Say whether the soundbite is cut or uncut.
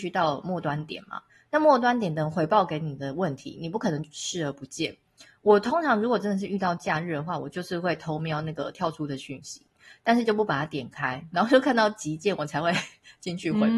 uncut